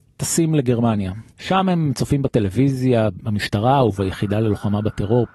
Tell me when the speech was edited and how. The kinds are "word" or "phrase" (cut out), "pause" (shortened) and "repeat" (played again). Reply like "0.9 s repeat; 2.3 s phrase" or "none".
1.3 s pause